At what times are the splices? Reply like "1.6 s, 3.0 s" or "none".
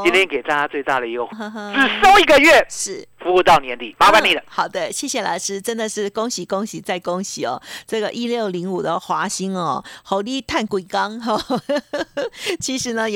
1.3 s

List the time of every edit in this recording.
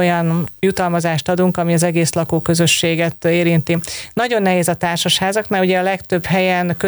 none

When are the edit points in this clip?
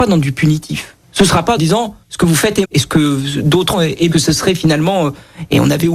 1.0 s, 1.6 s, 2.0 s, 2.6 s, 3.7 s, 4.1 s

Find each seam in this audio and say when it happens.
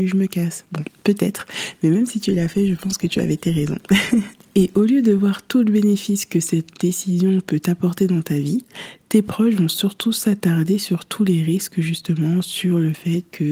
none

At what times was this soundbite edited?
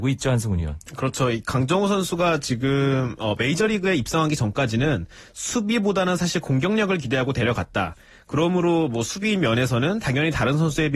none

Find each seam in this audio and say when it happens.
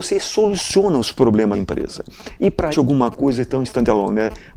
1.5 s, 2.7 s

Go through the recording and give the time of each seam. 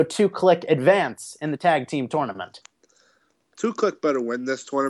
none

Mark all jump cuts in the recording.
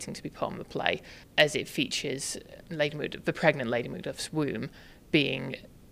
none

